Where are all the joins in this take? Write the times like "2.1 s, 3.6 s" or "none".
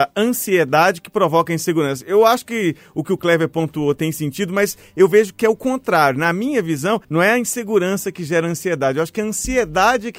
7.0 s